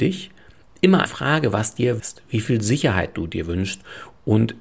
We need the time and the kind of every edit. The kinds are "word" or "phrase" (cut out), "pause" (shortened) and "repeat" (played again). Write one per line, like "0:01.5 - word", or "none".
0:01.1 - word
0:02.0 - word